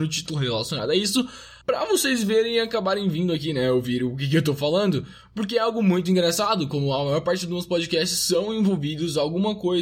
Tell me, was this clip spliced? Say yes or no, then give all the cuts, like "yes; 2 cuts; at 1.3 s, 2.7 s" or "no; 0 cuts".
yes; 1 cut; at 1.6 s